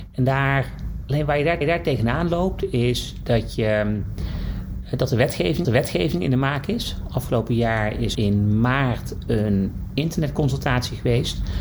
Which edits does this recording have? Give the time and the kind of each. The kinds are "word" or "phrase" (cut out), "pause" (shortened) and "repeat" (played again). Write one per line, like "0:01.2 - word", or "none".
0:01.6 - repeat
0:05.6 - repeat
0:08.1 - word